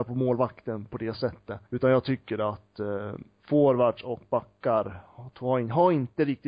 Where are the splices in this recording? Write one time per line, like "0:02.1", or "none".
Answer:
0:01.7